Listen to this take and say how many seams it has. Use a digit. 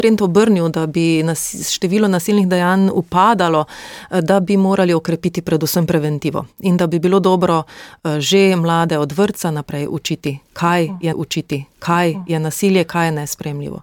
1